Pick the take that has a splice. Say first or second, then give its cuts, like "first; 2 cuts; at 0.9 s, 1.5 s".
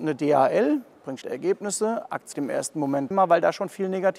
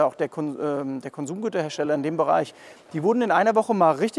first; 3 cuts; at 1.2 s, 2.3 s, 3.1 s